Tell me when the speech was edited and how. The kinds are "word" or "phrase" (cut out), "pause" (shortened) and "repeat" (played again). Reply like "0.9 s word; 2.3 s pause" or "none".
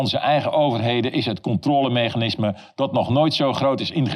none